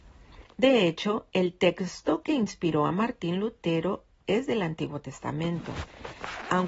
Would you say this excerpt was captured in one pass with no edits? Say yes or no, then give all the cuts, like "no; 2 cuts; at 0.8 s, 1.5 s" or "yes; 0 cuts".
yes; 0 cuts